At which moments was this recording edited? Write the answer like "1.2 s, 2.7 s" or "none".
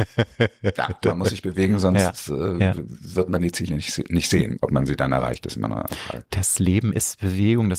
none